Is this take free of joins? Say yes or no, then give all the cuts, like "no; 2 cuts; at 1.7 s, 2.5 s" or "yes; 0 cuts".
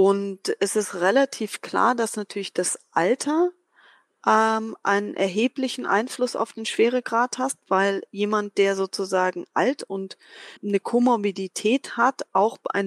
no; 1 cut; at 10.6 s